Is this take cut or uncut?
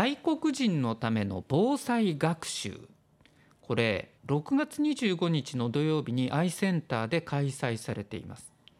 cut